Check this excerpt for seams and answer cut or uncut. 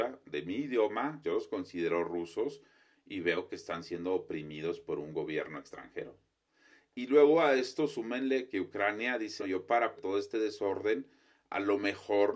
cut